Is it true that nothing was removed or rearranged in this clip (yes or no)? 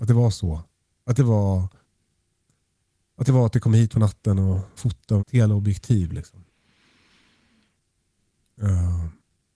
no